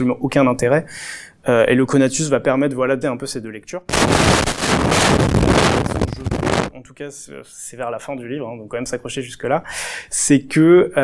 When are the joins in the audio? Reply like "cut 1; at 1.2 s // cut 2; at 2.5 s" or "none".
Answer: cut 1; at 3.0 s // cut 2; at 8.7 s